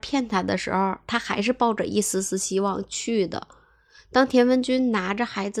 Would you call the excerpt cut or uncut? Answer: uncut